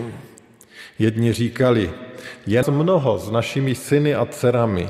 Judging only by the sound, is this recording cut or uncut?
cut